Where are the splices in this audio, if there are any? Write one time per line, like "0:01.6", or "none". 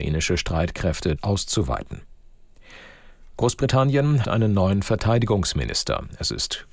0:01.2
0:04.2